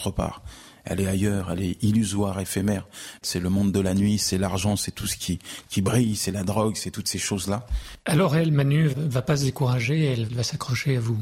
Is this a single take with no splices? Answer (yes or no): yes